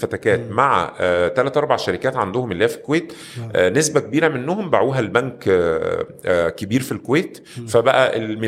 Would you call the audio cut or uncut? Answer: uncut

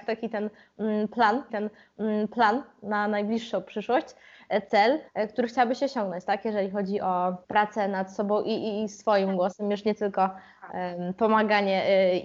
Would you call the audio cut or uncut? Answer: cut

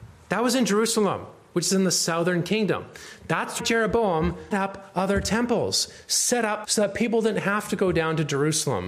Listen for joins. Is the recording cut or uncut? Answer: cut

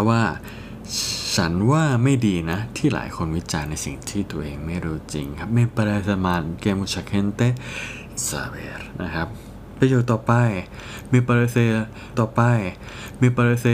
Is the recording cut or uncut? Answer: cut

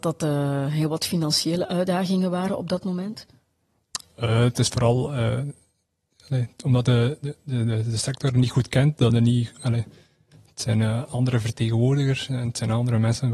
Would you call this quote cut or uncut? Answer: uncut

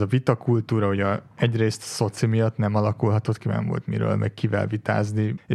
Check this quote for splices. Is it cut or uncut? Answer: uncut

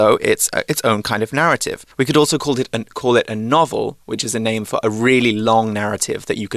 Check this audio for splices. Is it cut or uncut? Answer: cut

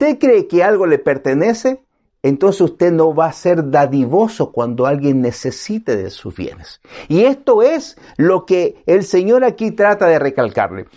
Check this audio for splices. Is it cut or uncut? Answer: uncut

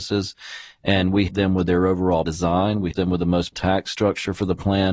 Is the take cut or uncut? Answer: cut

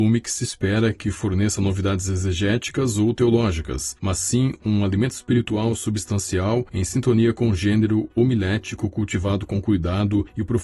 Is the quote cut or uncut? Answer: uncut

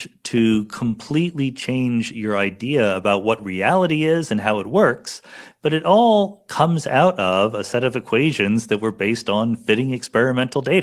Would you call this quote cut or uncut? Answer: uncut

